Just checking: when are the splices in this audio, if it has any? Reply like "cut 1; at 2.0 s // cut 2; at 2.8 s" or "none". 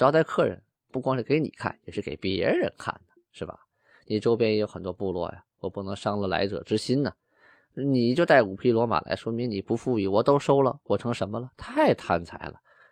none